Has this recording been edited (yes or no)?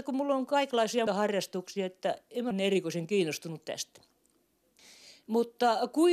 yes